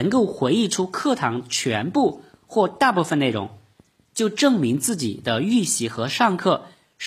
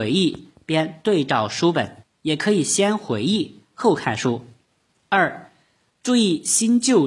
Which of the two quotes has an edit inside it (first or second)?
second